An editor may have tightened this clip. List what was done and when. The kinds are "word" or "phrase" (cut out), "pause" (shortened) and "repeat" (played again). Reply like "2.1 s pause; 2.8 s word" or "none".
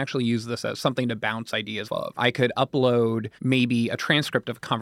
1.8 s word; 3.4 s pause